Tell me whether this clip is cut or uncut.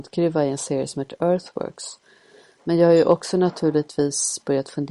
uncut